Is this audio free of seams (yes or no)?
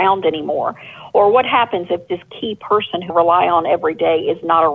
no